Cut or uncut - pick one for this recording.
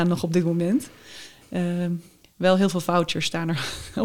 uncut